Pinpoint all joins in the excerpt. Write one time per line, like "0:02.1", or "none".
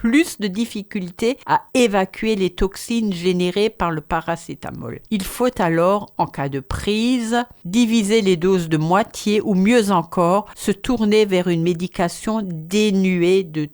none